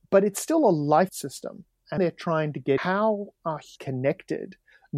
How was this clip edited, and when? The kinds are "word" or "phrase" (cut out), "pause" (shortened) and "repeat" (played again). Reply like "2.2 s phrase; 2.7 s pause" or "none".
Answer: 1.1 s word; 2.0 s word; 2.8 s word; 3.8 s word